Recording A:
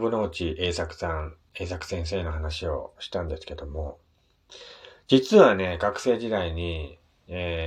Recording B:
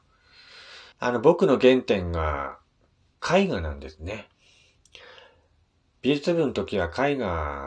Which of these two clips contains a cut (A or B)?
B